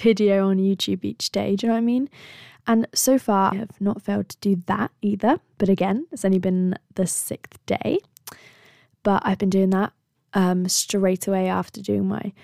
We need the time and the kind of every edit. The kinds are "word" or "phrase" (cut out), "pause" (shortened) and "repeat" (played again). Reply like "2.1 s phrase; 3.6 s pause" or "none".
3.5 s word